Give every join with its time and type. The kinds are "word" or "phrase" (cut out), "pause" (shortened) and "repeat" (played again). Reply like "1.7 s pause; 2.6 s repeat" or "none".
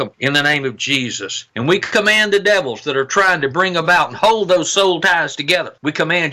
none